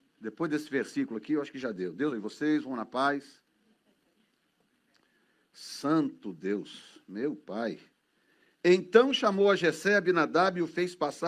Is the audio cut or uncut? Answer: cut